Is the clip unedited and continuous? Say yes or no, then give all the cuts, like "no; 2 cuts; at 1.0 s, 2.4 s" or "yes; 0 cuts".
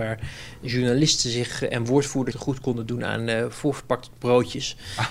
no; 1 cut; at 2.3 s